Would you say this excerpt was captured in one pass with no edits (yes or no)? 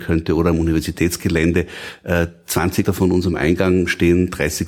no